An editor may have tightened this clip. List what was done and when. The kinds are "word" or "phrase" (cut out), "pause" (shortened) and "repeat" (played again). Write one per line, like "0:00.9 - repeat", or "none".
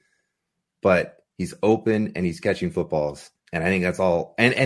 0:01.3 - pause
0:03.4 - pause